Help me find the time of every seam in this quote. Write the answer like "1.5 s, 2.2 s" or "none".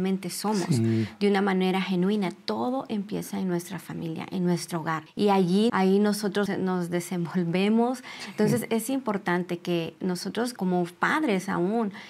5.1 s, 5.7 s, 6.5 s, 10.6 s